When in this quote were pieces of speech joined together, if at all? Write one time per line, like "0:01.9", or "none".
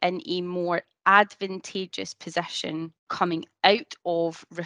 0:03.0

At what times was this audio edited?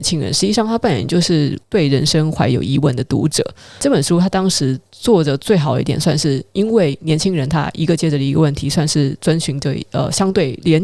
none

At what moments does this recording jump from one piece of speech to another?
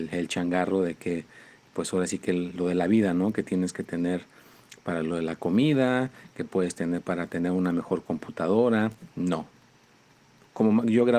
none

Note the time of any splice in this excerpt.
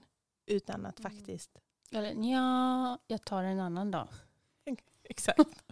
none

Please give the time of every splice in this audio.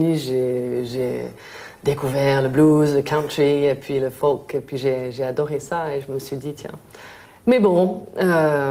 0:07.3

